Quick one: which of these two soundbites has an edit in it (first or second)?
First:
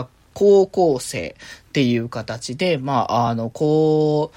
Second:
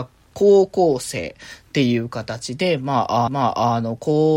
second